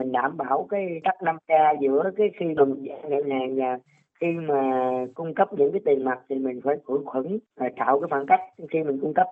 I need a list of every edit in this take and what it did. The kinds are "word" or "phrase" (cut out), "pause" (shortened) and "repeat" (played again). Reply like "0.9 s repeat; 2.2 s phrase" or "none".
none